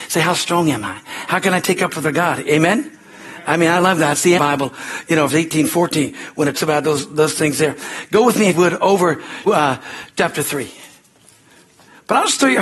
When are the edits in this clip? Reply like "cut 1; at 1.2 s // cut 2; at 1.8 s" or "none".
cut 1; at 2.0 s // cut 2; at 4.4 s // cut 3; at 5.3 s // cut 4; at 6.5 s // cut 5; at 8.5 s // cut 6; at 9.5 s // cut 7; at 10.2 s